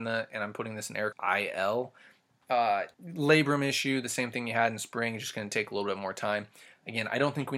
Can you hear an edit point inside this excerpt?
yes; 2 cuts; at 1.1 s, 2.9 s

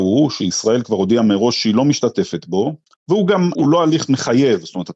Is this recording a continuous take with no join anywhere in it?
no; 2 cuts; at 2.9 s, 3.5 s

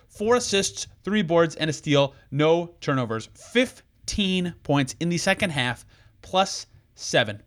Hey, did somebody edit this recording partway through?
no; 0 cuts

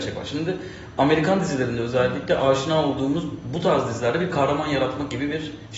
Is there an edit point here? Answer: no; 0 cuts

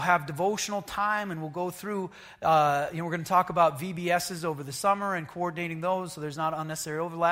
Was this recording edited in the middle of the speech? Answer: no; 0 cuts

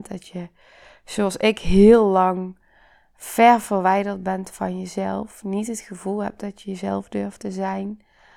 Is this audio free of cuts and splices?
yes; 0 cuts

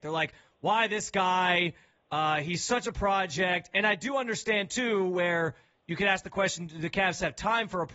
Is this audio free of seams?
yes; 0 cuts

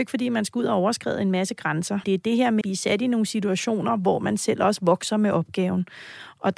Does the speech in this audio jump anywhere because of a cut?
yes; 2 cuts; at 2.0 s, 2.6 s

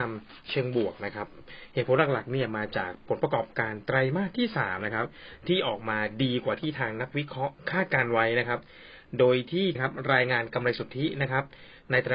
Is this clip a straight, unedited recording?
no; 1 cut; at 9.8 s

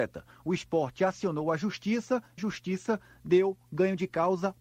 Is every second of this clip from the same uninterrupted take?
no; 1 cut; at 2.4 s

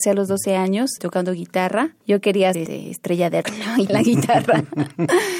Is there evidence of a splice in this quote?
yes; 4 cuts; at 1.0 s, 2.5 s, 3.4 s, 3.9 s

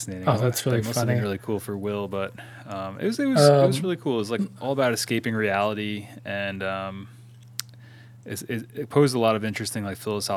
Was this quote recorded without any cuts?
yes; 0 cuts

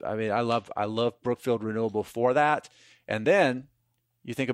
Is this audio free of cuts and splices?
yes; 0 cuts

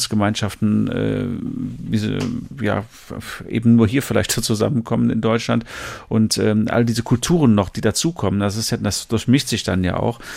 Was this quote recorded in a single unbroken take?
yes; 0 cuts

